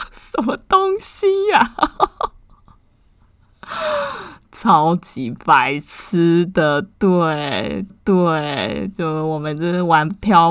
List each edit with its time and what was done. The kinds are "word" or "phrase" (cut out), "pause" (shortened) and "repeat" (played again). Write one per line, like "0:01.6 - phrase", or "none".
0:07.9 - repeat